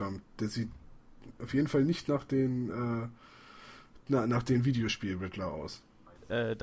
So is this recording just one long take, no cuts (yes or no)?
yes